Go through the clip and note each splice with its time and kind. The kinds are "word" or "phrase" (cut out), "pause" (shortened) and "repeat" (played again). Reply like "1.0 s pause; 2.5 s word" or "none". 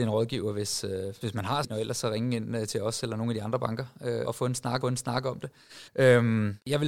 1.2 s word; 1.6 s word; 4.2 s word; 4.8 s repeat; 5.9 s pause